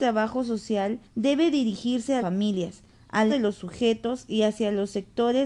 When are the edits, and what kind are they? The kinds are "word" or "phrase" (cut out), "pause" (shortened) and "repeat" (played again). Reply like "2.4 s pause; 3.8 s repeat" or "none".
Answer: 1.0 s pause; 2.2 s word; 3.3 s word